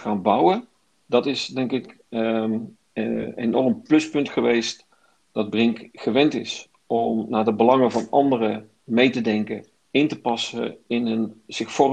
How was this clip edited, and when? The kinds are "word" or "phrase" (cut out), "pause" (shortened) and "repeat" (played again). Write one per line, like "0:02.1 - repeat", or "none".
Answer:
0:09.8 - pause